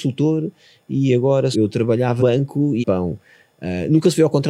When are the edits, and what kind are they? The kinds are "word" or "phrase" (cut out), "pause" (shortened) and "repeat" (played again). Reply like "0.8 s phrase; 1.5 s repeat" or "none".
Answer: 1.5 s phrase; 2.2 s word; 2.8 s phrase